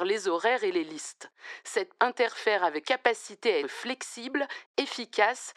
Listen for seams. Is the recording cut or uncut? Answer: cut